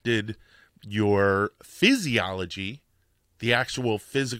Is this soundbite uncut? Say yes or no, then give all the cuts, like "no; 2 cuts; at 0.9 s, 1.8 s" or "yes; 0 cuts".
yes; 0 cuts